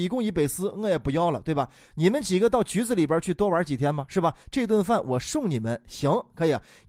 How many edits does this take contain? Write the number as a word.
zero